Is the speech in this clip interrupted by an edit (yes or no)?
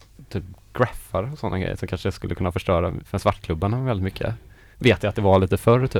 no